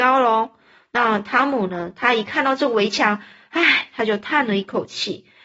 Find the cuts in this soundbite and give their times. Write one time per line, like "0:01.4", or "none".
none